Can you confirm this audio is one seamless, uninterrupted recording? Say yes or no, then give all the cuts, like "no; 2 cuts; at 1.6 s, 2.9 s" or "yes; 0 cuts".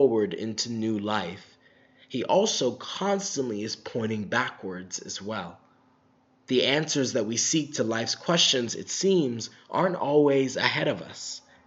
yes; 0 cuts